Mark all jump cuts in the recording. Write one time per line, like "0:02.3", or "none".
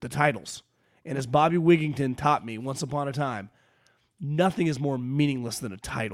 none